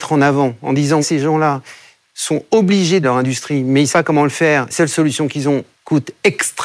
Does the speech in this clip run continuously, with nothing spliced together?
no; 5 cuts; at 1.0 s, 3.0 s, 3.9 s, 4.7 s, 5.7 s

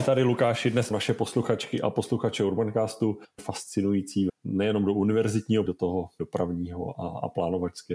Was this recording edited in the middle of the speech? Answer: yes; 4 cuts; at 0.9 s, 3.4 s, 4.3 s, 5.7 s

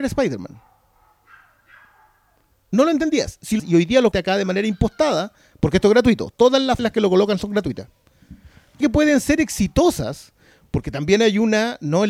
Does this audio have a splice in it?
yes; 4 cuts; at 3.6 s, 4.1 s, 6.8 s, 8.8 s

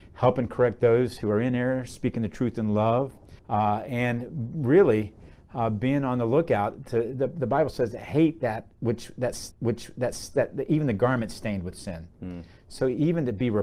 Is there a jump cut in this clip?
yes; 2 cuts; at 3.4 s, 9.5 s

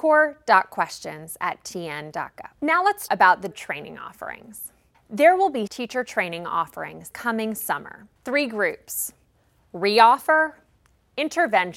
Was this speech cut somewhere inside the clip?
yes; 7 cuts; at 2.5 s, 3.1 s, 3.5 s, 4.9 s, 5.7 s, 7.1 s, 8.2 s

